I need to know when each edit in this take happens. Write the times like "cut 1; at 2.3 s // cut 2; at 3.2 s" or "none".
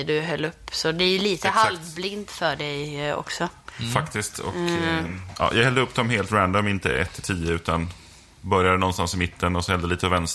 none